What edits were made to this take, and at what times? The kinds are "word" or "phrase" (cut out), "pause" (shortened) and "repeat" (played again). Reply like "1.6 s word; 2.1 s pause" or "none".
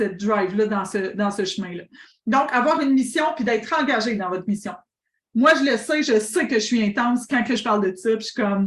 none